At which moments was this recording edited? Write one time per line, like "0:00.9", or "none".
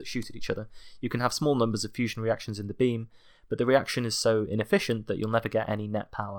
none